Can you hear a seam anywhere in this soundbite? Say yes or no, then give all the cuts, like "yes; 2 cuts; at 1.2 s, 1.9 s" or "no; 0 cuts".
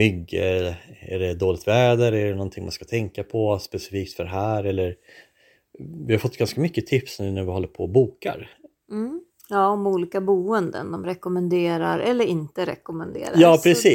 yes; 1 cut; at 9.3 s